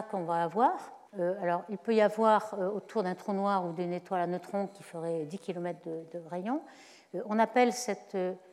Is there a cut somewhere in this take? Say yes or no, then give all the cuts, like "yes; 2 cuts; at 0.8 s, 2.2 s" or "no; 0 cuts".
yes; 1 cut; at 1.1 s